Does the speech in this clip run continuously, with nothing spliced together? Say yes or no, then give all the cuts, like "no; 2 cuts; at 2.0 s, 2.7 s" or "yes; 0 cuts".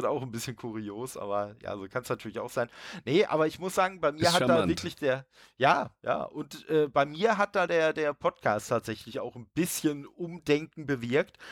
yes; 0 cuts